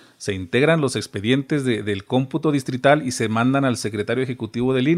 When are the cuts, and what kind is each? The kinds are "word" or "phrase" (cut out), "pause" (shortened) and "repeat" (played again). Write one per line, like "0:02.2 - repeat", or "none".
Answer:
none

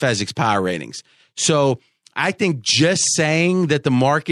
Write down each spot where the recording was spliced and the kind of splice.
none

